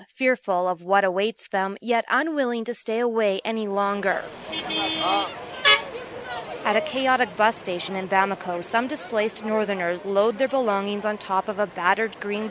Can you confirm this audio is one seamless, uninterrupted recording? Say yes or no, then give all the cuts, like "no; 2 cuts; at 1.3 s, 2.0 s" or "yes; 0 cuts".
yes; 0 cuts